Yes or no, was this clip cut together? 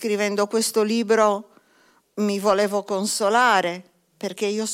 no